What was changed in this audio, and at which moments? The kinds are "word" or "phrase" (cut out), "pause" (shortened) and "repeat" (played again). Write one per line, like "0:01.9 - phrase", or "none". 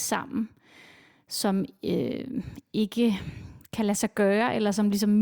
none